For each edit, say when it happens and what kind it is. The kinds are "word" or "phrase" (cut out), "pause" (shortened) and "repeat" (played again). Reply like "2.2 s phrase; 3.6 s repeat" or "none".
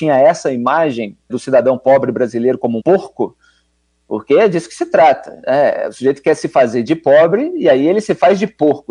1.3 s word; 2.8 s word

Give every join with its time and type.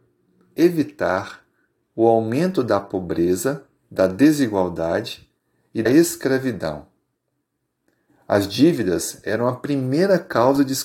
5.9 s word

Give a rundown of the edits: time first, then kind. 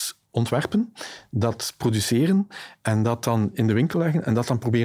none

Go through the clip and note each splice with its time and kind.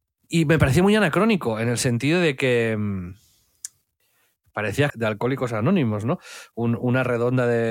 4.9 s phrase

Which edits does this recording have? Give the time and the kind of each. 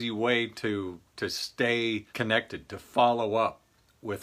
2.1 s pause

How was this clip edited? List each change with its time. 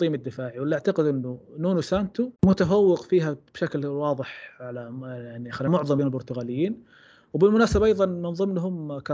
2.4 s pause; 5.7 s phrase; 6.0 s word

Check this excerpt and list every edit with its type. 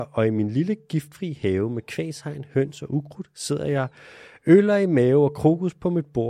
none

